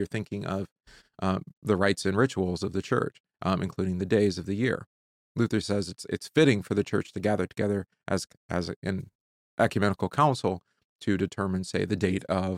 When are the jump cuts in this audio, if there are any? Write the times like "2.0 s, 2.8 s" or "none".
none